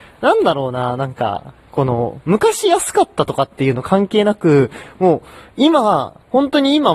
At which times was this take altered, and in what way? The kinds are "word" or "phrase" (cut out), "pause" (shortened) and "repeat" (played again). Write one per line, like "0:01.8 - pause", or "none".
none